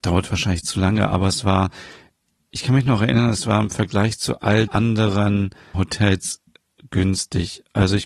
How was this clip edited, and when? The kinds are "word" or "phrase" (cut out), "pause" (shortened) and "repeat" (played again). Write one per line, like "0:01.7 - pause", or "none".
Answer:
0:04.7 - word
0:05.7 - word